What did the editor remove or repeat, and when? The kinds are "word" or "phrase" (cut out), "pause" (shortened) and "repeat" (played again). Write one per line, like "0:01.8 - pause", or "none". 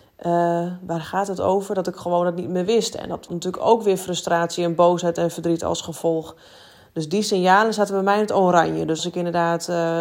0:03.3 - word
0:09.0 - word

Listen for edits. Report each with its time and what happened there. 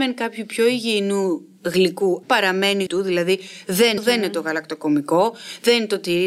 0:02.2 - word
0:02.9 - phrase
0:04.0 - phrase

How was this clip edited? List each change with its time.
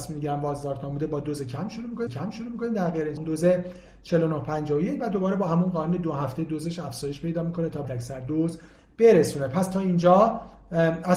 0:02.1 - repeat
0:03.2 - phrase
0:07.8 - word

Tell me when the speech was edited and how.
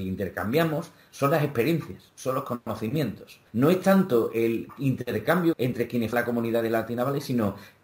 0:03.5 - pause
0:05.5 - phrase
0:06.1 - word

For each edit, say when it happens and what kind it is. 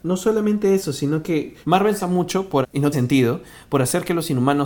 0:01.6 - pause
0:02.0 - word
0:02.6 - word
0:02.9 - word

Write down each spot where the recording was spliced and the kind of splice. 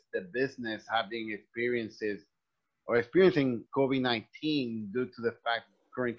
0:03.7 - word

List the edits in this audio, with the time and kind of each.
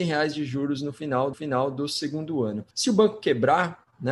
0:01.3 - repeat
0:02.7 - pause

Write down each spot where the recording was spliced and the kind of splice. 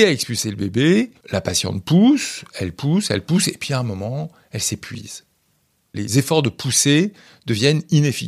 0:01.2 - pause

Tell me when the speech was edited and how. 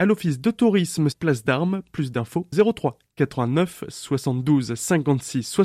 0:01.1 - word
0:02.5 - word

